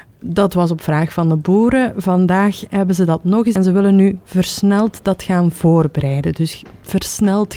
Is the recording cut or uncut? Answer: cut